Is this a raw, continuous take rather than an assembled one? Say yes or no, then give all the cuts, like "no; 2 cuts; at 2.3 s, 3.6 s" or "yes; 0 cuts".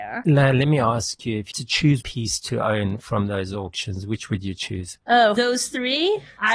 no; 3 cuts; at 1.5 s, 2.0 s, 5.4 s